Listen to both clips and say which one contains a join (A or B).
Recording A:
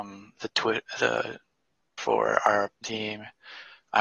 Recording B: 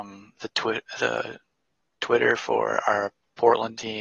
A